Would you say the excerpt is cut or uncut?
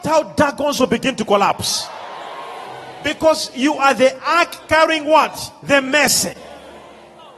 uncut